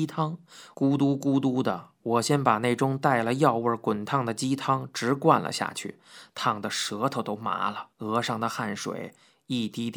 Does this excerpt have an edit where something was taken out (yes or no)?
yes